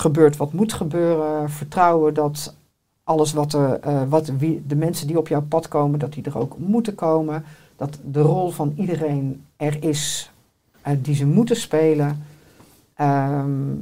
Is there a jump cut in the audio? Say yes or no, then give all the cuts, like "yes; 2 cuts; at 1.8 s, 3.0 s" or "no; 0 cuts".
no; 0 cuts